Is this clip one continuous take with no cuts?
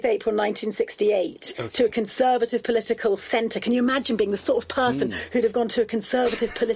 yes; 0 cuts

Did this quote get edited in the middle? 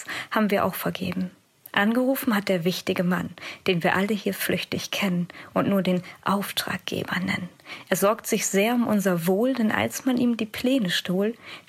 no; 0 cuts

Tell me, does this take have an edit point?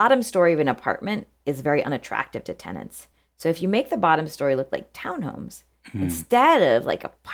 no; 0 cuts

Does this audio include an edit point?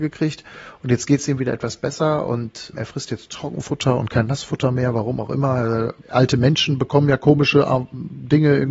yes; 1 cut; at 6.0 s

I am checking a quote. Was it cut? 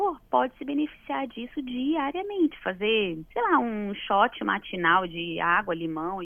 yes; 1 cut; at 3.3 s

